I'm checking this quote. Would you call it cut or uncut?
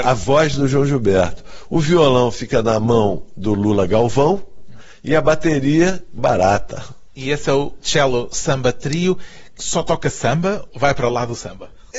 cut